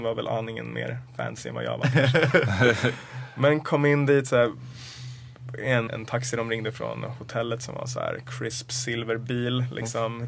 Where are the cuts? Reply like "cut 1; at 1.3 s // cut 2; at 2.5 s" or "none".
cut 1; at 5.9 s